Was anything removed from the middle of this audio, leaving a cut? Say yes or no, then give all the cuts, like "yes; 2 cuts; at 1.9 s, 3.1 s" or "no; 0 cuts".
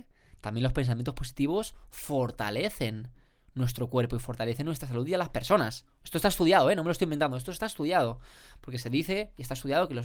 no; 0 cuts